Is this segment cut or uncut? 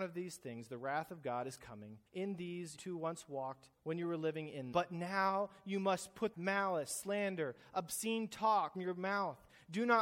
cut